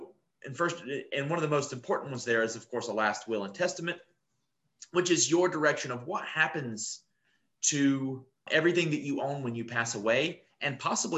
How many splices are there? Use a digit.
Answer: 0